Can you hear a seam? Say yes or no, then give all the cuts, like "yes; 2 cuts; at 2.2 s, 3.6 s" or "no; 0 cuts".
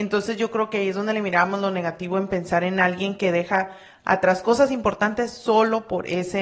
no; 0 cuts